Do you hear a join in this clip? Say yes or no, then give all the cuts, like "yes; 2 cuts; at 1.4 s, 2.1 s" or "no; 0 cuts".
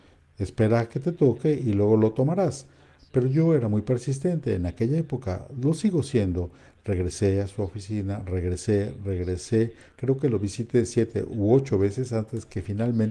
no; 0 cuts